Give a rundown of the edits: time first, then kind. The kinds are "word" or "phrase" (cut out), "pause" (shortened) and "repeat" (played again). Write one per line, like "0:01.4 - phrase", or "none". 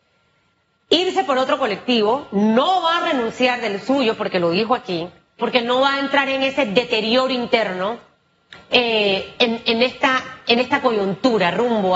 0:05.4 - word